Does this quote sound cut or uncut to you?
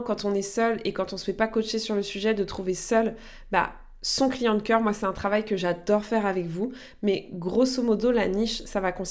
uncut